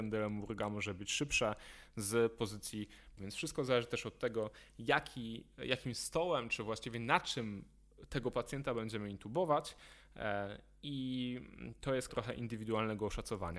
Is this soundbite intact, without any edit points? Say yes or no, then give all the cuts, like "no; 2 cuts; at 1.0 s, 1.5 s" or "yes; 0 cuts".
no; 2 cuts; at 3.2 s, 12.1 s